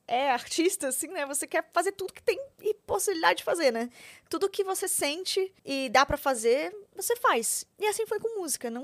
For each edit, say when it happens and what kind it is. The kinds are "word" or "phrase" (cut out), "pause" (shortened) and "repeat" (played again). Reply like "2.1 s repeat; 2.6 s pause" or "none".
2.5 s pause; 5.6 s pause; 7.7 s pause